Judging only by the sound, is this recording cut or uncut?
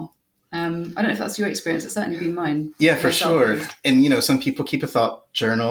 uncut